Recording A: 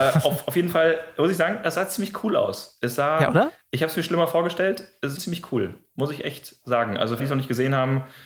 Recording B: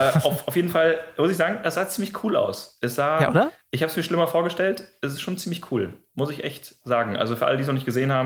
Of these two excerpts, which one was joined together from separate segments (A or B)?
A